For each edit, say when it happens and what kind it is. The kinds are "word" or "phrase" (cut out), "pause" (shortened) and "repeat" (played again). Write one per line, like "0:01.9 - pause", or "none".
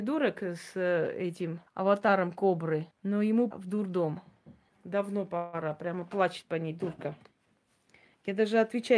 0:01.7 - pause
0:02.9 - pause
0:03.5 - word
0:04.7 - pause